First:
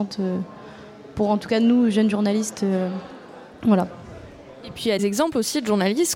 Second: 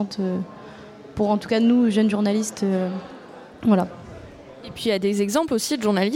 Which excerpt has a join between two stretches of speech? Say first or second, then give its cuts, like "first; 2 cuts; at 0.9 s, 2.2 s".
first; 1 cut; at 5.0 s